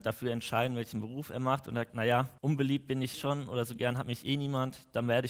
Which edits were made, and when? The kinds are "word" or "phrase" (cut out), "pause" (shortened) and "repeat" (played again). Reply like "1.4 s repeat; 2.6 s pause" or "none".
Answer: 1.9 s word; 2.4 s pause; 3.1 s word